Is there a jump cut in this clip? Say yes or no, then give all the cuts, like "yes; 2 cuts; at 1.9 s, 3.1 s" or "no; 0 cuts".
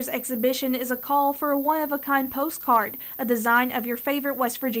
no; 0 cuts